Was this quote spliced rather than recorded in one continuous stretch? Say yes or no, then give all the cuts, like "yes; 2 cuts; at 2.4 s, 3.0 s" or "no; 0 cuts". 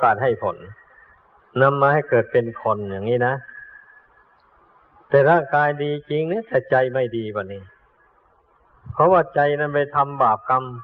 no; 0 cuts